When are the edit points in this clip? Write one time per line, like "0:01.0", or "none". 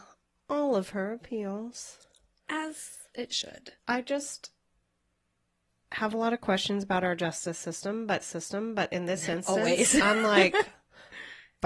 0:03.8
0:08.2